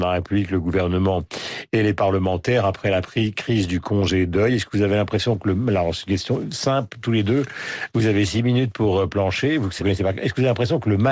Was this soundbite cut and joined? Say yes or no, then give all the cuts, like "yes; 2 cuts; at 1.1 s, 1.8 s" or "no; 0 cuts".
yes; 1 cut; at 9.8 s